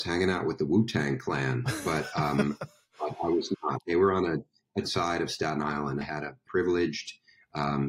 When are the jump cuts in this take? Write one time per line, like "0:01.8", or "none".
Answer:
0:04.8
0:06.0
0:06.5